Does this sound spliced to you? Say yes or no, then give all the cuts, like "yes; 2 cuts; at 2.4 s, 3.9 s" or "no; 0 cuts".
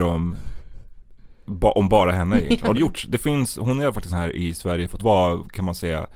yes; 3 cuts; at 2.7 s, 4.1 s, 5.0 s